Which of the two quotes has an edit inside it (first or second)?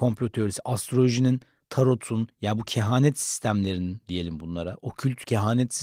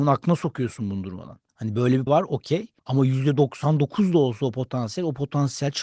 second